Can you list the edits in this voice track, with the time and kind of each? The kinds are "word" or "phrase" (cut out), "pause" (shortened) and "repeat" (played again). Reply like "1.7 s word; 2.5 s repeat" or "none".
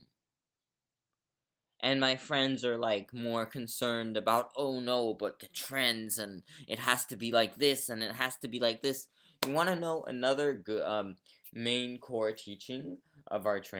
none